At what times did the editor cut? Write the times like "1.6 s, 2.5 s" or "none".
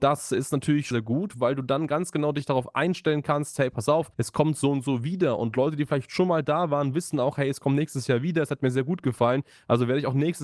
0.9 s, 4.1 s